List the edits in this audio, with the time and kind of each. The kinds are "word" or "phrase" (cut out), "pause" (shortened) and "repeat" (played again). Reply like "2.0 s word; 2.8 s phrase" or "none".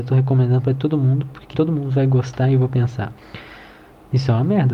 1.5 s word